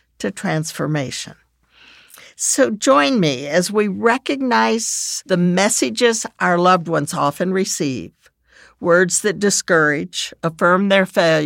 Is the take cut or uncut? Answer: uncut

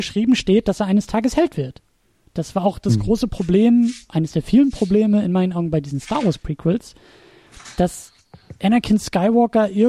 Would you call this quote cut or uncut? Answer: uncut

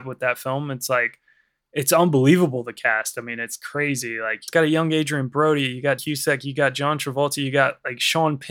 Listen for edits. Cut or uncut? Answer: cut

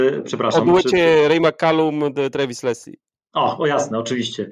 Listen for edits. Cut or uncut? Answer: uncut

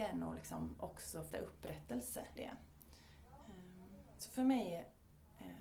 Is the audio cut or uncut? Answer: cut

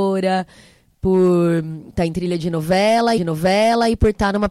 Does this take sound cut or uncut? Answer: cut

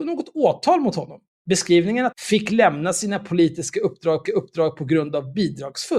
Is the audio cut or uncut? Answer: cut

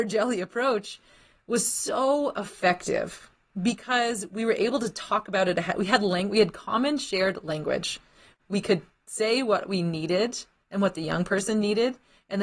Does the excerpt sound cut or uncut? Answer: uncut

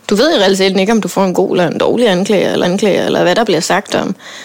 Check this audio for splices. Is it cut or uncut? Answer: cut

